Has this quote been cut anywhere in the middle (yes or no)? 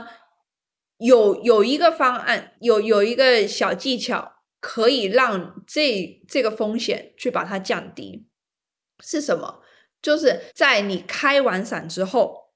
yes